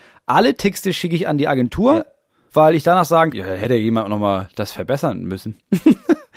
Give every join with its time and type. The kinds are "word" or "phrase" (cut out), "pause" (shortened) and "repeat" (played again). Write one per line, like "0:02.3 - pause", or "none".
0:03.3 - word